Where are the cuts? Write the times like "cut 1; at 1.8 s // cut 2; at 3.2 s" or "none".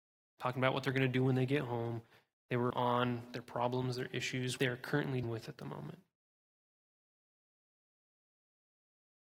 cut 1; at 2.7 s // cut 2; at 4.6 s // cut 3; at 5.2 s